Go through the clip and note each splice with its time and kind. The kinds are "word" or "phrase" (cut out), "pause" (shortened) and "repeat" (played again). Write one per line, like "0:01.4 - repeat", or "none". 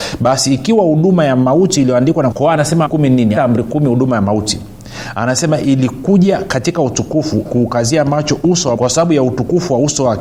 0:02.3 - phrase
0:02.8 - word
0:03.4 - word
0:07.4 - phrase
0:08.8 - word